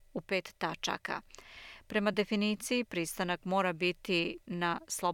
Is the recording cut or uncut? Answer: uncut